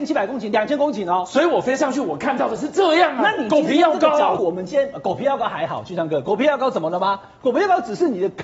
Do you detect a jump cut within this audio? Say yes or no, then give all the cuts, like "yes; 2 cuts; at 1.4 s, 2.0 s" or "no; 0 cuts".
yes; 1 cut; at 4.4 s